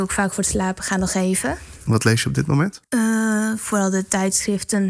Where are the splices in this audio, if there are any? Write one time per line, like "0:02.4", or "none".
0:02.9